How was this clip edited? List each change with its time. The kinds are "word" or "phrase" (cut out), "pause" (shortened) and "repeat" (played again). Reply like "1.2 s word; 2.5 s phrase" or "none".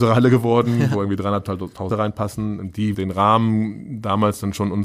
1.9 s word; 2.9 s word